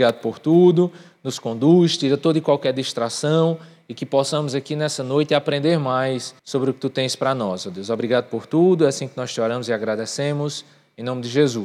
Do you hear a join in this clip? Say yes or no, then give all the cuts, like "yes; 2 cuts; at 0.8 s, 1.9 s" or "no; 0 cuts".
yes; 1 cut; at 6.4 s